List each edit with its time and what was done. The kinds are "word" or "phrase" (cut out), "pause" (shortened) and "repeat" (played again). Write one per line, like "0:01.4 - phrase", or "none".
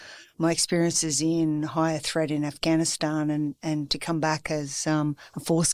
none

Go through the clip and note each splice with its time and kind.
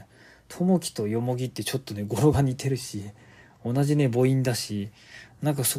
none

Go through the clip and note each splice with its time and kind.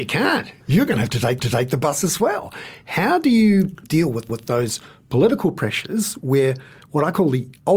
0:01.4 - repeat
0:03.8 - word
0:04.3 - repeat

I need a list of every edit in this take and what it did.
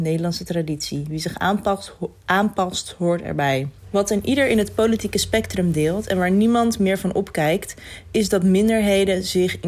0:03.8 - pause

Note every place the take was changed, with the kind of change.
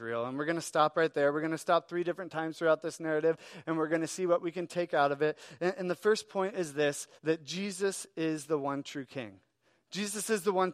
0:07.2 - pause

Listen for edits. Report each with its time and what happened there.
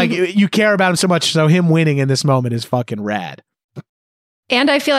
none

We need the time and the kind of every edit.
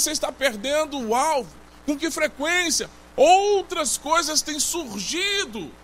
none

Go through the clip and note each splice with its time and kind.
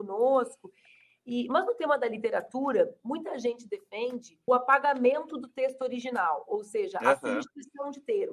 0:04.5 - word

